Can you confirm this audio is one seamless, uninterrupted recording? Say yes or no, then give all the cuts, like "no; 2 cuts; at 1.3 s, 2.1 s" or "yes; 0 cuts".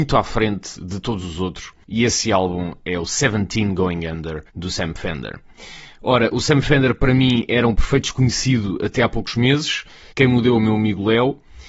no; 3 cuts; at 4.5 s, 10.1 s, 10.6 s